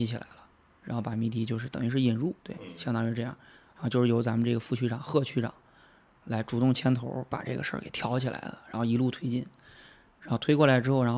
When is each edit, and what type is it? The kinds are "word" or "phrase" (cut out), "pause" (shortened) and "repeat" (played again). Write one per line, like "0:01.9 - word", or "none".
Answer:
0:02.4 - pause